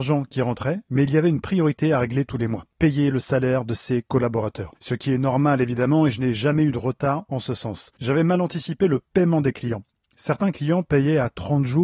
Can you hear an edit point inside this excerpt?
no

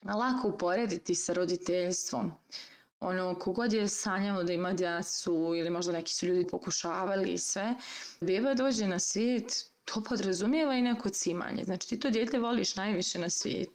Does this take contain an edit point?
yes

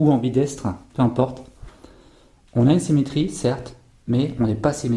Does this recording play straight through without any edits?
yes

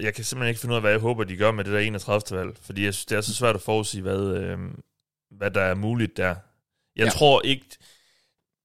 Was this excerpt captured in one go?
yes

